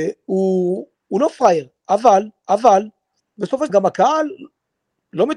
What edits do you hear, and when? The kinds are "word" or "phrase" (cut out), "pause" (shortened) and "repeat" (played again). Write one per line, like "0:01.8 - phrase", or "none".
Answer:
0:02.4 - repeat
0:03.7 - word